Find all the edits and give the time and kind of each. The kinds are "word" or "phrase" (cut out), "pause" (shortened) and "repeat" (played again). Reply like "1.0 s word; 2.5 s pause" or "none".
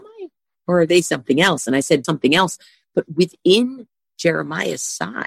2.0 s word